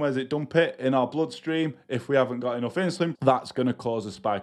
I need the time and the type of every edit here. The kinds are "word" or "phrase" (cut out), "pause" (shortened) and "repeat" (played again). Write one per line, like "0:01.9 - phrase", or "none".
0:03.1 - word